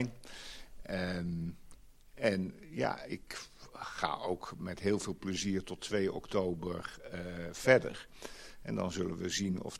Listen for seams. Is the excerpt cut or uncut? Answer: uncut